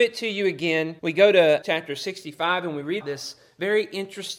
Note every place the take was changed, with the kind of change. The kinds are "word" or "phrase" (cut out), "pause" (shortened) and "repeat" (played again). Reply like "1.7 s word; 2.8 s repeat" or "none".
1.0 s pause; 1.6 s word; 3.0 s word

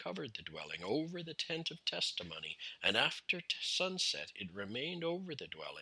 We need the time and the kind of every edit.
none

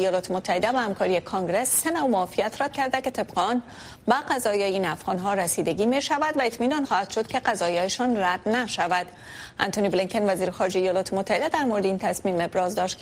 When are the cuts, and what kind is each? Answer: 2.7 s word; 6.8 s word

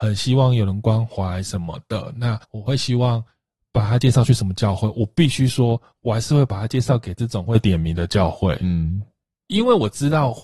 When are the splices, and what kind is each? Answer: 2.4 s pause

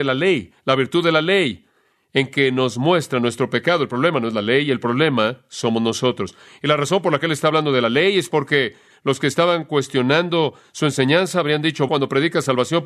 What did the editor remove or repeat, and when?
11.9 s word

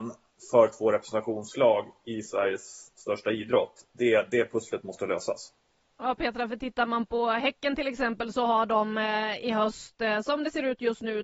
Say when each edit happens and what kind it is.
5.9 s pause

